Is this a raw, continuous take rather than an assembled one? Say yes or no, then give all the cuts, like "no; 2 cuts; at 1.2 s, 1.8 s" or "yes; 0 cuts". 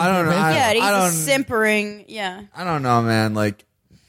yes; 0 cuts